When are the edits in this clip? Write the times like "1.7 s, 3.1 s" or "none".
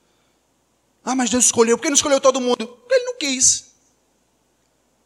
none